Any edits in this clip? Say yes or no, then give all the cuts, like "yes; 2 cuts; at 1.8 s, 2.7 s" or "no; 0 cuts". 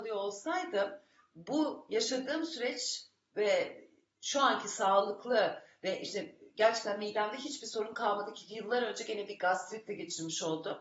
no; 0 cuts